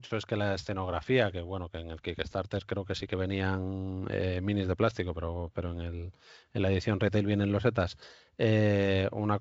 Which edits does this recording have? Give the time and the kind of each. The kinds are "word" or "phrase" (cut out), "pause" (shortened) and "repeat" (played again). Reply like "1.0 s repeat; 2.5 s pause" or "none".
none